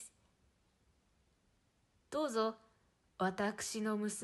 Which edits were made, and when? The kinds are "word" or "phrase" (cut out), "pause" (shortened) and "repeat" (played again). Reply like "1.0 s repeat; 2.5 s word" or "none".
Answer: none